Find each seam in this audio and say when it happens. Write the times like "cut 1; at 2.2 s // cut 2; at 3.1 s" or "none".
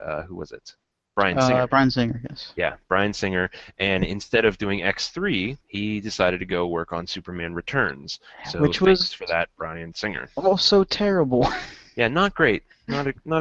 cut 1; at 5.6 s